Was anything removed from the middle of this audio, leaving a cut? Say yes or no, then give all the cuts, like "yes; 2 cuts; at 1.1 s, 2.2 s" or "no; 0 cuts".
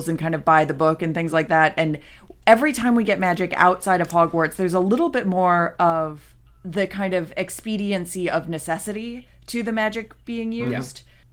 no; 0 cuts